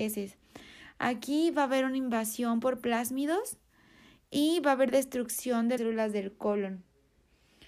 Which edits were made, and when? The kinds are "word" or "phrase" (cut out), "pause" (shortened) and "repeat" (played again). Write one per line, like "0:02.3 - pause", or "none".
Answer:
0:05.8 - word